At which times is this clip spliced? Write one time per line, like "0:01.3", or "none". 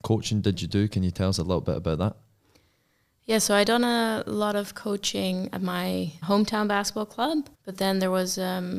0:05.5
0:06.2
0:07.5